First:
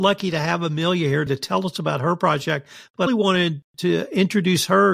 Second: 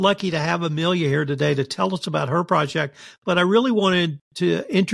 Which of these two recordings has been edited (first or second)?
first